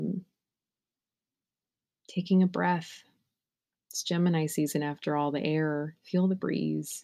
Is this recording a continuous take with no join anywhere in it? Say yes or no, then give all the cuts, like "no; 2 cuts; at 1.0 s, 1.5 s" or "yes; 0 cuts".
yes; 0 cuts